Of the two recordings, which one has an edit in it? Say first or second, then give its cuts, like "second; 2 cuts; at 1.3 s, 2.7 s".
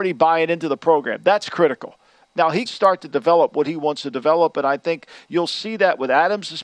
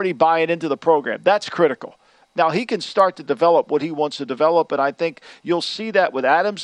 first; 1 cut; at 2.6 s